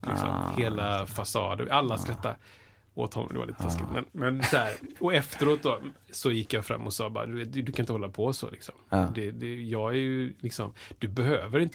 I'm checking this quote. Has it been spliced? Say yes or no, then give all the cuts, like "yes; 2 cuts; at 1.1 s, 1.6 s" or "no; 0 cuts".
yes; 1 cut; at 4.1 s